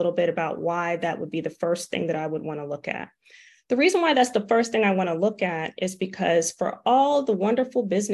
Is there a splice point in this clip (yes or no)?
no